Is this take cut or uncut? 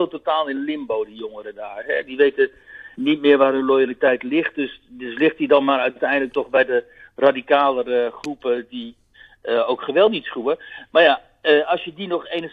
uncut